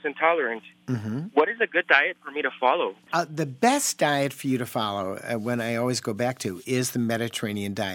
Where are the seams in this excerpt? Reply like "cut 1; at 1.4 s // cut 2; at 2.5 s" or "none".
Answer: cut 1; at 3.0 s